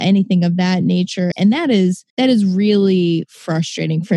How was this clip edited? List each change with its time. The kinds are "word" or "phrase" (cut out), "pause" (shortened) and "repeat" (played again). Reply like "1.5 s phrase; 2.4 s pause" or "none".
1.3 s word; 2.1 s pause